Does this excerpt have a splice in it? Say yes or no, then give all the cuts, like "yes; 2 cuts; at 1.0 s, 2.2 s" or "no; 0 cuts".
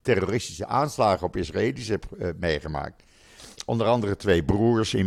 no; 0 cuts